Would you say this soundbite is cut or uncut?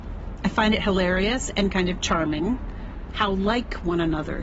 uncut